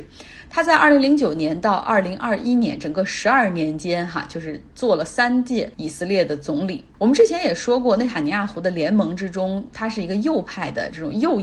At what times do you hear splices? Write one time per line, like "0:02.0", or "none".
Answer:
0:05.7
0:06.9